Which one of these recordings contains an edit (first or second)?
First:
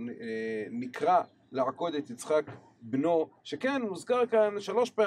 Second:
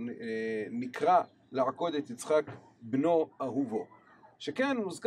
first